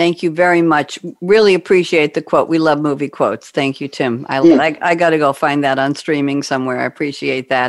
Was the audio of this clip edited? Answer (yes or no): yes